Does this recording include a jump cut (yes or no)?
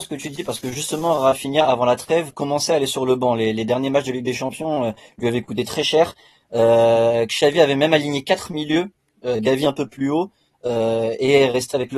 no